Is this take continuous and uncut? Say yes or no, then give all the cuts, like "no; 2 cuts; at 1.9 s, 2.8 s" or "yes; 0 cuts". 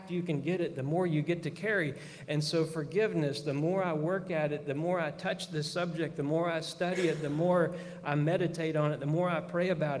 yes; 0 cuts